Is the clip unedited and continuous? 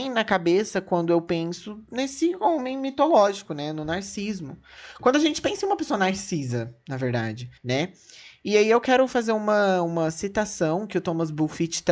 no; 1 cut; at 7.6 s

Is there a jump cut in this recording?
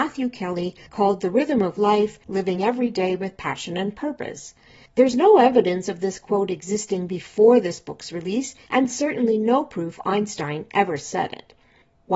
no; 0 cuts

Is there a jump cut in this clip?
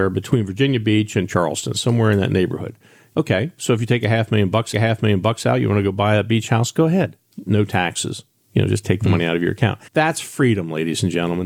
yes; 2 cuts; at 4.7 s, 9.9 s

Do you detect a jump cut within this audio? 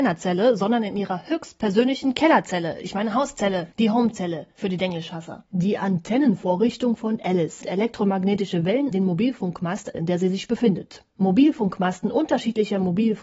yes; 3 cuts; at 7.6 s, 8.9 s, 9.9 s

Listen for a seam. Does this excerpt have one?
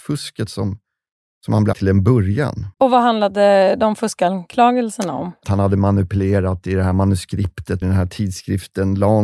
yes; 4 cuts; at 1.7 s, 2.7 s, 5.4 s, 7.8 s

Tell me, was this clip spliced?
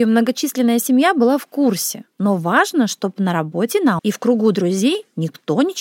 yes; 1 cut; at 4.0 s

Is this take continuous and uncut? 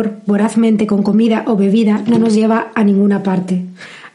yes; 0 cuts

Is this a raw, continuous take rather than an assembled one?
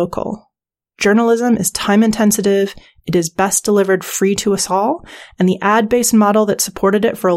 yes; 0 cuts

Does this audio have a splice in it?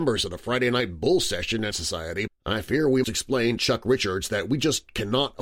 yes; 4 cuts; at 1.7 s, 2.3 s, 3.0 s, 3.6 s

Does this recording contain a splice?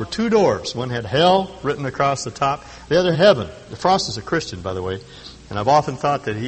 yes; 1 cut; at 3.1 s

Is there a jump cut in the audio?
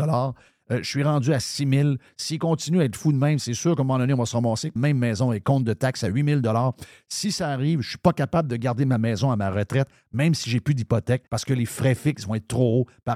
yes; 3 cuts; at 4.8 s, 5.4 s, 11.3 s

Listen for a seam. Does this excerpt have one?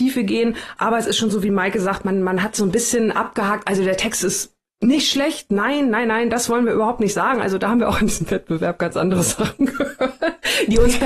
no; 0 cuts

